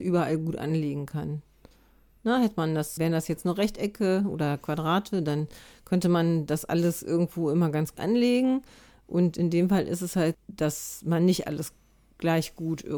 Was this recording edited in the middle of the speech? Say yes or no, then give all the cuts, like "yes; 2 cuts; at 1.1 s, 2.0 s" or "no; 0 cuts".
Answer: yes; 3 cuts; at 3.0 s, 8.0 s, 10.3 s